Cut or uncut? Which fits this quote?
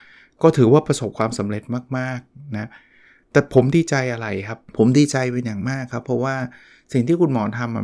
cut